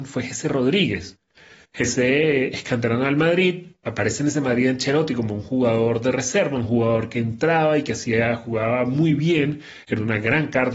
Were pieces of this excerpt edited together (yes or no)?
no